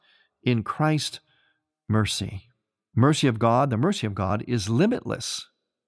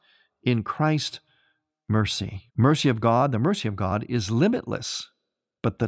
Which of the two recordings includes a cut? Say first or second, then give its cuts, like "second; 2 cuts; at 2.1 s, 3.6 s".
second; 1 cut; at 2.5 s